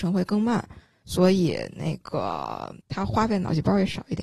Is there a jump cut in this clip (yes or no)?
yes